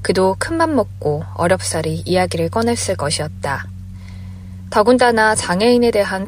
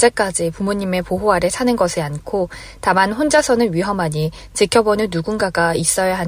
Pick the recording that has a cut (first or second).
second